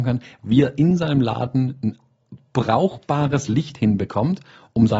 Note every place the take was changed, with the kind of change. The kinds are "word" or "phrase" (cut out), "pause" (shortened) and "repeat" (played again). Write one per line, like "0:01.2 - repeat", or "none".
none